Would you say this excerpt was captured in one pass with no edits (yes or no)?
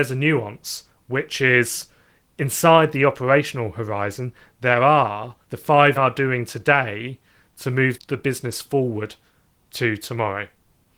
no